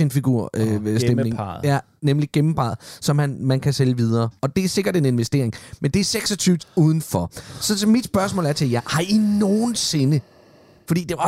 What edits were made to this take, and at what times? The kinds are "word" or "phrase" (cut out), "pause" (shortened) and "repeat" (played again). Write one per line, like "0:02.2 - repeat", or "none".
0:04.4 - pause
0:06.6 - word